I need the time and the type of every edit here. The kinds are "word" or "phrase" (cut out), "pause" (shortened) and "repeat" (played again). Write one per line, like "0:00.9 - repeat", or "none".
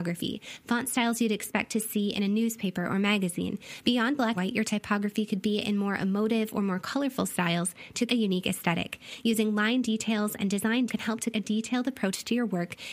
0:04.4 - word
0:08.1 - word
0:10.9 - word
0:11.3 - word